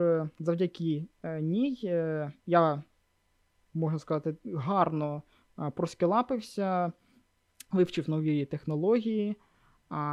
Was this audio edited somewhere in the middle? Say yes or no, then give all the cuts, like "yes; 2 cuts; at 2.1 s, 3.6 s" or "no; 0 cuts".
no; 0 cuts